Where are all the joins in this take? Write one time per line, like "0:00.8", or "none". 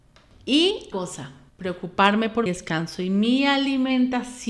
0:00.9
0:01.5
0:02.5